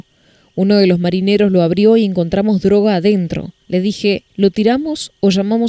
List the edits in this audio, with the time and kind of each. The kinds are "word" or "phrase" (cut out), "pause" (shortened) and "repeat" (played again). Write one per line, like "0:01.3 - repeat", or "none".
0:03.6 - pause
0:04.3 - pause